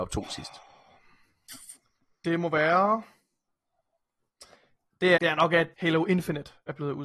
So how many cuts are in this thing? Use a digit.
2